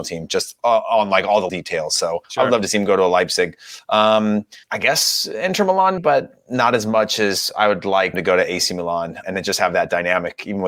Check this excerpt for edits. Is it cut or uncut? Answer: cut